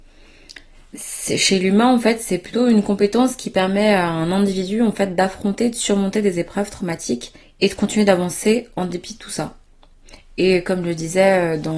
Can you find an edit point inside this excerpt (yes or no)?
yes